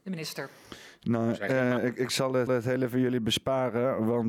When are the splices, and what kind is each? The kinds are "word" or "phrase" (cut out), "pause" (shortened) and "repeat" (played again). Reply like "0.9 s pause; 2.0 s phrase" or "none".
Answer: 2.5 s repeat